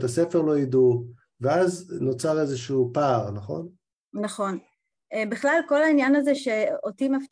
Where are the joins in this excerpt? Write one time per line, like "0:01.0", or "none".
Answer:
none